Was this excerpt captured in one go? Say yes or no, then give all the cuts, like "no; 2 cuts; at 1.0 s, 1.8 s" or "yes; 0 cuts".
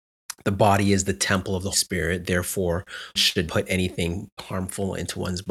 no; 4 cuts; at 1.7 s, 3.2 s, 3.5 s, 4.4 s